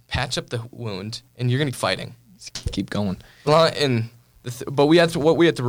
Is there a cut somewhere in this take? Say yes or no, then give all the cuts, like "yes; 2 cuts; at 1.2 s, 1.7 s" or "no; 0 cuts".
yes; 4 cuts; at 1.3 s, 1.7 s, 2.5 s, 3.5 s